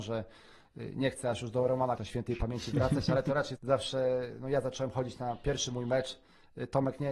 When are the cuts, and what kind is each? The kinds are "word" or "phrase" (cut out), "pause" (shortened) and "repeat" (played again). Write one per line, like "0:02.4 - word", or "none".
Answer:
0:02.0 - word
0:03.6 - word